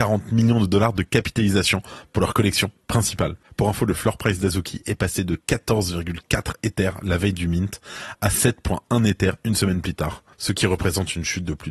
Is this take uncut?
no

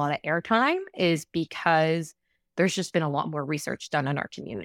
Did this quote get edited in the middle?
no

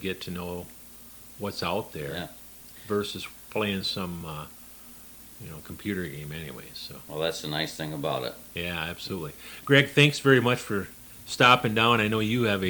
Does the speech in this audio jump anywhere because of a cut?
no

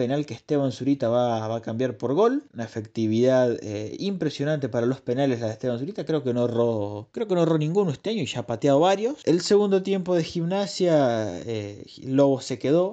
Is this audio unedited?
yes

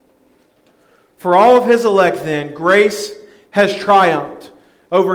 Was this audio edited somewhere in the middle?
no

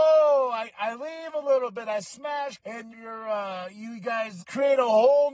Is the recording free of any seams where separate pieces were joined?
no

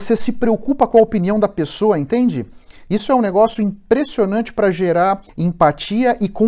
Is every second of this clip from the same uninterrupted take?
no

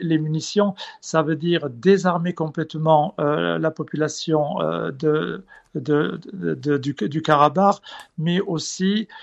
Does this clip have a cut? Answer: no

